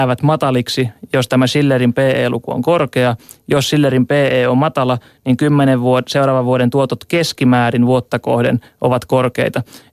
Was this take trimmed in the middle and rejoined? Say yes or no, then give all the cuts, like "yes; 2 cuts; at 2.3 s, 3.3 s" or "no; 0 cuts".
no; 0 cuts